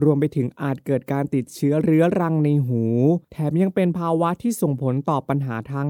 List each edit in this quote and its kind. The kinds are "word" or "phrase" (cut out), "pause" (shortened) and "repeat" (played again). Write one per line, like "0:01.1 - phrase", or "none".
0:03.2 - pause